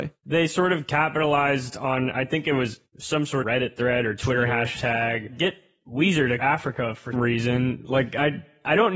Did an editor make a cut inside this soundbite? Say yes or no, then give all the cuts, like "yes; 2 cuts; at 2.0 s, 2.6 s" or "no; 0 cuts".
yes; 3 cuts; at 3.4 s, 6.4 s, 7.1 s